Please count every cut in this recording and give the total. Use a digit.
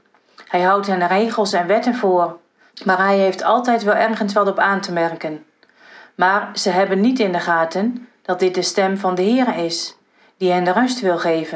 0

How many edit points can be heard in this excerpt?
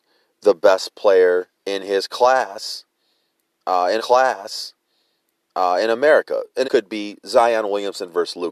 3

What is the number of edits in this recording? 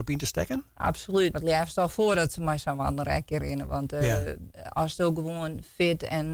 1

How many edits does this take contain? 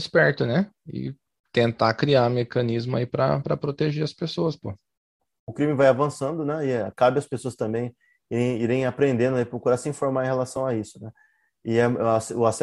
0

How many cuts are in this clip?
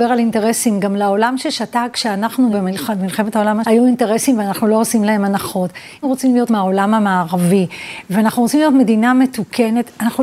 4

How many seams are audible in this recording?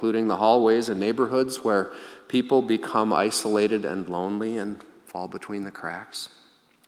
0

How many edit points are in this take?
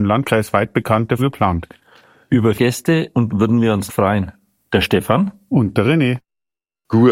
4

